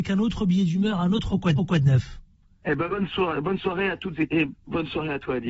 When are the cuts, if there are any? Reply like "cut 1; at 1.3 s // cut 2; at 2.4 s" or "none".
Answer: cut 1; at 1.6 s // cut 2; at 4.3 s